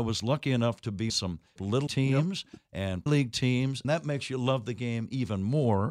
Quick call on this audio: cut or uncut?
cut